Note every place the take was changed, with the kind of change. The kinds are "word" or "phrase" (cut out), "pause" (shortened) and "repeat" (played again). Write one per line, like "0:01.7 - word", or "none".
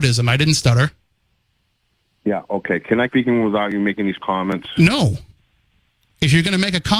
0:03.1 - word
0:04.2 - word